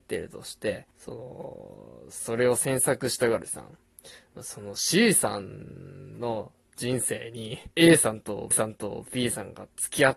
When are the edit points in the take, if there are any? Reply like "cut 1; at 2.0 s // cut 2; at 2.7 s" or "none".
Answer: cut 1; at 0.9 s // cut 2; at 3.5 s // cut 3; at 7.7 s // cut 4; at 8.5 s